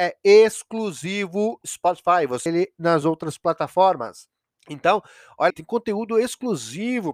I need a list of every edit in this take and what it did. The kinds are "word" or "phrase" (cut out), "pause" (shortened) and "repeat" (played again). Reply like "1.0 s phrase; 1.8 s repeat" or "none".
1.6 s word; 2.5 s phrase; 3.0 s word; 4.4 s pause; 5.5 s word